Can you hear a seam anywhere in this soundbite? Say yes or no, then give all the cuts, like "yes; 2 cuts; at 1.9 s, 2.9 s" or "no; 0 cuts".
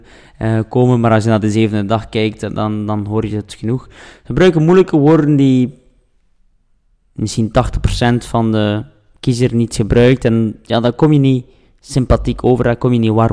no; 0 cuts